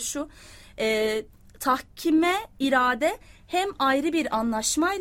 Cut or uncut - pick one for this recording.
cut